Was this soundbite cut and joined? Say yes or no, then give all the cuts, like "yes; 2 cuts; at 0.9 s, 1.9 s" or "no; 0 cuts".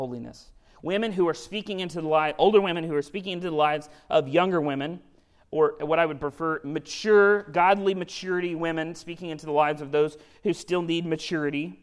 no; 0 cuts